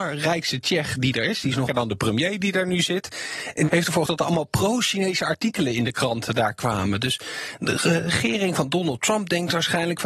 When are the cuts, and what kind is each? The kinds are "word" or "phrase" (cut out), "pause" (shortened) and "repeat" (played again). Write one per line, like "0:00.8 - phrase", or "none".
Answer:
0:01.7 - word
0:03.7 - word
0:04.1 - word